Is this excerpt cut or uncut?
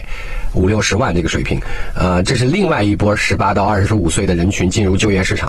uncut